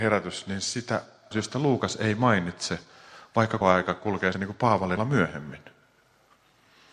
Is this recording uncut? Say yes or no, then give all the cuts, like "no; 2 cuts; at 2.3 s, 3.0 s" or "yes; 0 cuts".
no; 4 cuts; at 1.3 s, 3.6 s, 4.3 s, 5.0 s